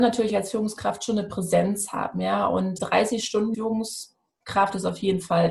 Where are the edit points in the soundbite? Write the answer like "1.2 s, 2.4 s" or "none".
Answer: 2.8 s, 3.5 s